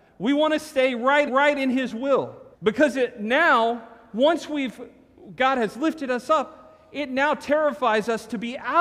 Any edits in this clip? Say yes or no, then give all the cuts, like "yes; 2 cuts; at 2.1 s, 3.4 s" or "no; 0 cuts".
yes; 2 cuts; at 1.3 s, 2.5 s